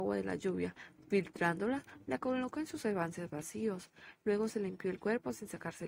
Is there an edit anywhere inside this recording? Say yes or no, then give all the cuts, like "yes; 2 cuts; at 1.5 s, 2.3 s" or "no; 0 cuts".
no; 0 cuts